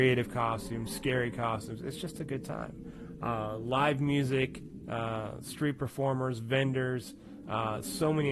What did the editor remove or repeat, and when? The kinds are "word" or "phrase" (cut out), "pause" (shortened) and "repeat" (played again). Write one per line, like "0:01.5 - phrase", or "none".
none